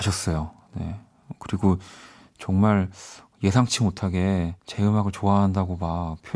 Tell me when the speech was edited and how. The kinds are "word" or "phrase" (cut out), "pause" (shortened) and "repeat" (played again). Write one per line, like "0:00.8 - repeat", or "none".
0:04.6 - pause